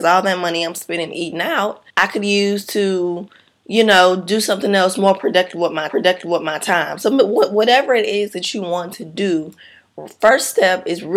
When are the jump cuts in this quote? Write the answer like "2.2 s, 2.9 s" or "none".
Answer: 1.9 s, 5.9 s